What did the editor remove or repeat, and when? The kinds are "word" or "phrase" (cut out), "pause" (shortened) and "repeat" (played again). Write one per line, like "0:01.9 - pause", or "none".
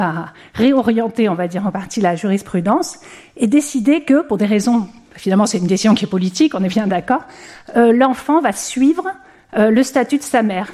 none